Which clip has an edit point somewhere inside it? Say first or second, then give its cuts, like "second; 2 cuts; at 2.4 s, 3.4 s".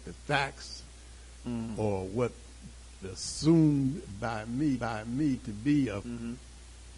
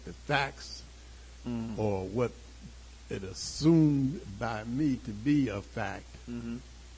first; 3 cuts; at 3.0 s, 4.8 s, 6.0 s